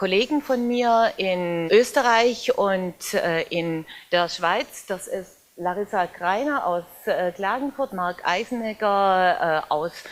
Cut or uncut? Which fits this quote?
cut